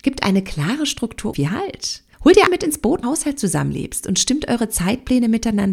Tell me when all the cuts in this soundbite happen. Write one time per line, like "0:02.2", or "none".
0:01.3
0:02.1
0:02.5
0:03.0

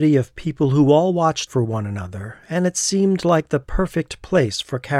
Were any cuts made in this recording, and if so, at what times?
0:01.5

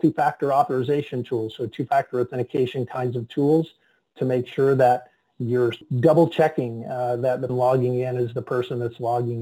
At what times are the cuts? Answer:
0:07.5

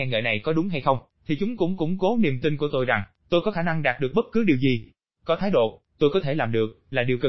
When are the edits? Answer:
none

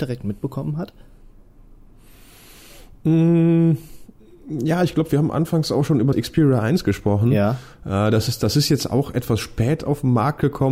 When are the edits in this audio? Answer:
0:06.1

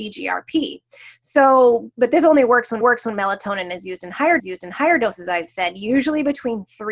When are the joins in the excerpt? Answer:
0:01.9
0:02.8
0:04.4
0:05.5

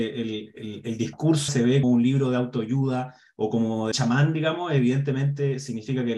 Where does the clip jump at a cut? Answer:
0:01.5
0:01.8
0:03.9

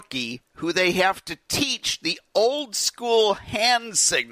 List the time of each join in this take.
none

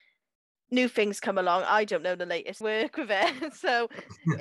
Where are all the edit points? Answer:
0:02.6

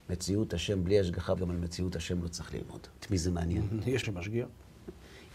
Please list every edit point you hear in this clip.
0:01.4
0:03.0
0:04.0

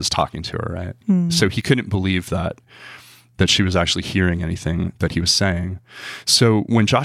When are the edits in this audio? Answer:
none

